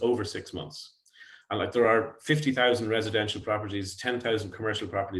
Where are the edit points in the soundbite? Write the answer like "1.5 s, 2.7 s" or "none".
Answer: none